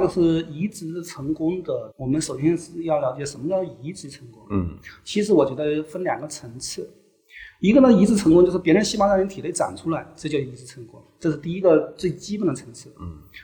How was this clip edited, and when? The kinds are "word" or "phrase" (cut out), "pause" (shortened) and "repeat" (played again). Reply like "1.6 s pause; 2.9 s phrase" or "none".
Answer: 1.9 s pause